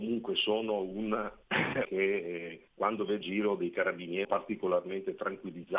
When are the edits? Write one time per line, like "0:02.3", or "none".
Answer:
0:01.8
0:02.7
0:03.2
0:04.2